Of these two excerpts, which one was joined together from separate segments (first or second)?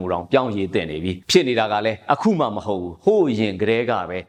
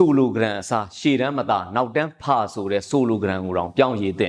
first